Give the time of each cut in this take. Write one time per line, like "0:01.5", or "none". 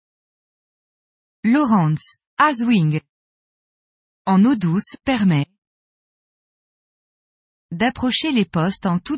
0:02.2
0:05.0